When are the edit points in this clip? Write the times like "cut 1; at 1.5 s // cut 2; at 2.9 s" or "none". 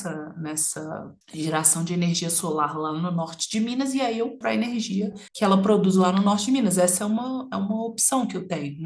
cut 1; at 1.2 s // cut 2; at 4.4 s // cut 3; at 5.3 s